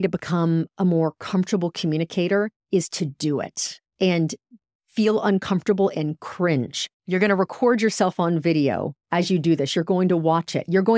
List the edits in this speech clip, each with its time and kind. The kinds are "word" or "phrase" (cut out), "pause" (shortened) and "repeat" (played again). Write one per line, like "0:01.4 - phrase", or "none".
0:02.6 - pause
0:03.9 - pause
0:06.9 - pause
0:09.0 - pause